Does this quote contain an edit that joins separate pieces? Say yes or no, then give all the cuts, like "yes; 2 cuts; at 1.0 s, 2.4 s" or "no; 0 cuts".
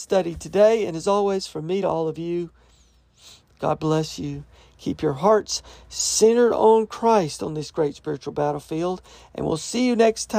no; 0 cuts